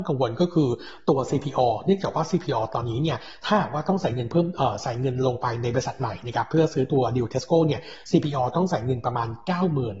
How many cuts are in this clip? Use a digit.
0